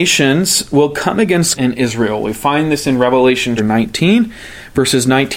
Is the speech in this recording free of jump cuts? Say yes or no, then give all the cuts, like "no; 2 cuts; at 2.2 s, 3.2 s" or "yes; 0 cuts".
no; 2 cuts; at 1.5 s, 3.6 s